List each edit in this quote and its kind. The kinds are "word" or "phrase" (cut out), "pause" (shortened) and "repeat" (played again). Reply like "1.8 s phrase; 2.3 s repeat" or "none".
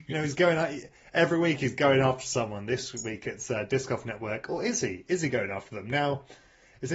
none